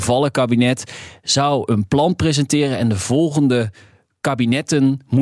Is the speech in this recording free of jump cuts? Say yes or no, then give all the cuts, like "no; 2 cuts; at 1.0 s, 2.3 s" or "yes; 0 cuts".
yes; 0 cuts